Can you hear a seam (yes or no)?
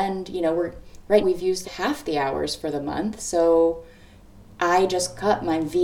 yes